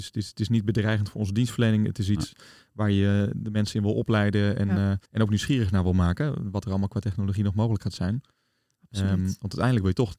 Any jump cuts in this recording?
yes; 1 cut; at 5.1 s

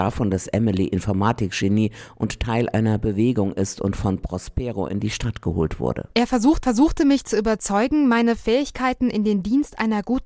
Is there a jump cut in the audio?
yes; 1 cut; at 6.6 s

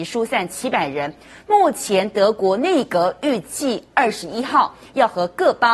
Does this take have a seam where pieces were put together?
no; 0 cuts

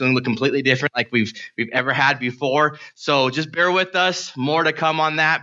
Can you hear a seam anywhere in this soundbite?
no; 0 cuts

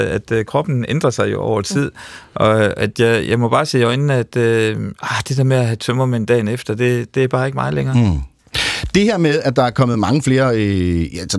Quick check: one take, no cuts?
yes; 0 cuts

